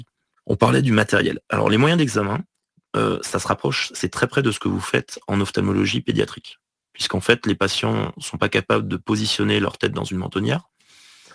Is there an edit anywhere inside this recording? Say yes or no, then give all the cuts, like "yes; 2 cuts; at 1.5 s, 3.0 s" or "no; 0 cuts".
no; 0 cuts